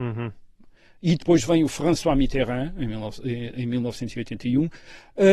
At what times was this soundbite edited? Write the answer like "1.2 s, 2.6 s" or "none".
none

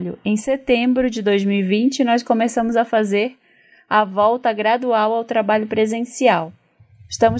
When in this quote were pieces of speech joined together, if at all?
none

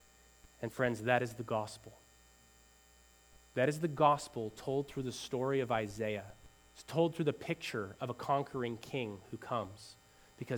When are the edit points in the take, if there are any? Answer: 6.6 s

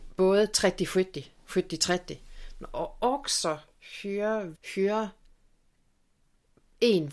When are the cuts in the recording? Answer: 4.6 s

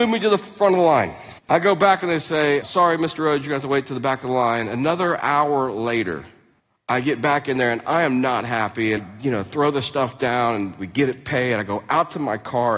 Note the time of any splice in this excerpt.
1.4 s, 2.6 s, 6.6 s, 9.0 s

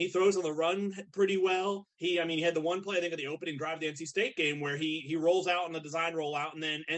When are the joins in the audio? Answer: 1.9 s

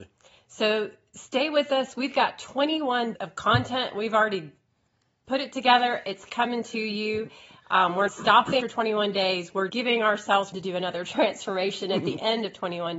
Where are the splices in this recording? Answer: 3.2 s, 8.1 s, 8.6 s, 9.7 s, 10.5 s

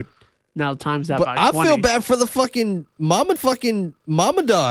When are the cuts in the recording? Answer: 3.4 s

